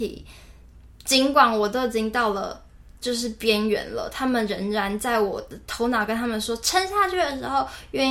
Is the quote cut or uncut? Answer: cut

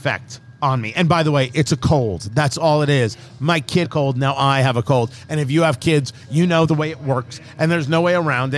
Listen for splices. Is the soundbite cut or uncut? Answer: cut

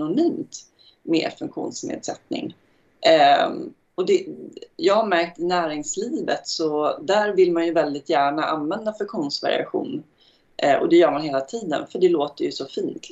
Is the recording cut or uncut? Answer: uncut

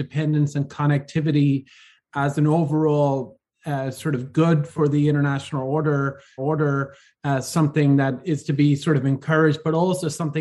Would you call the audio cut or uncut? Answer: cut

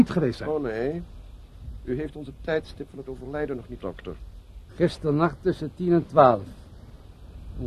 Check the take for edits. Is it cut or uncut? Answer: cut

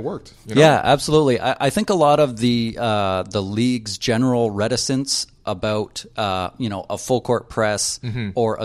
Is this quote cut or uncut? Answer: uncut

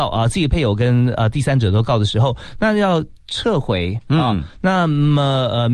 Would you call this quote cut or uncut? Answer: uncut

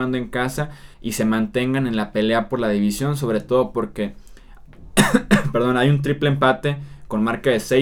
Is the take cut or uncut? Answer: cut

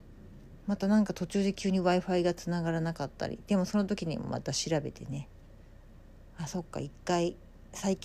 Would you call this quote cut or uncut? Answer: uncut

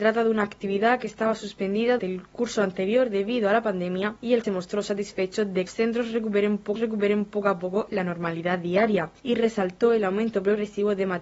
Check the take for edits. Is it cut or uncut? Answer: cut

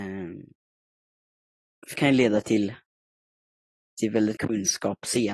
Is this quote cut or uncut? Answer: cut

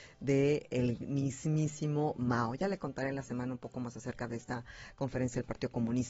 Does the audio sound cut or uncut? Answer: uncut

